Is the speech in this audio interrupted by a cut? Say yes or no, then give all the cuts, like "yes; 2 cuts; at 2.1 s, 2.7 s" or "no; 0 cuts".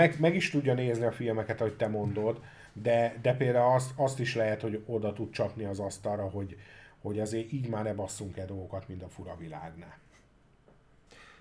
no; 0 cuts